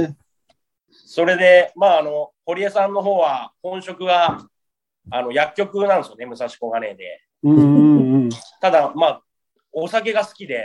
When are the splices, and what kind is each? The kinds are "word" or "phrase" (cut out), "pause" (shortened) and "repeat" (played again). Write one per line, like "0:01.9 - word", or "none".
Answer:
0:02.3 - pause